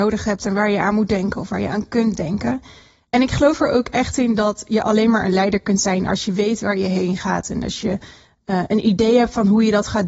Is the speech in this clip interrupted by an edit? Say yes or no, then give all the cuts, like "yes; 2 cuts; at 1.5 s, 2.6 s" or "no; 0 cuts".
no; 0 cuts